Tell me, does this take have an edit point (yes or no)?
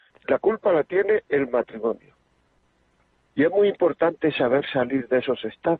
no